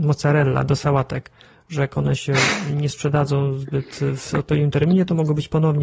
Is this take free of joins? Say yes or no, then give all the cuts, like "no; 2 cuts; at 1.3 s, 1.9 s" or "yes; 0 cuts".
yes; 0 cuts